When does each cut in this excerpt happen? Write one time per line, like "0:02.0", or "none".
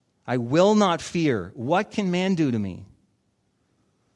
none